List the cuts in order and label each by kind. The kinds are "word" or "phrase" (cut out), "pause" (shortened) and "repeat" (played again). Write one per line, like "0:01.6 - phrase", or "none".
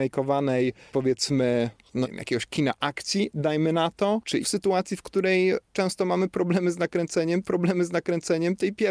0:00.9 - word
0:02.0 - word
0:04.4 - phrase
0:07.4 - repeat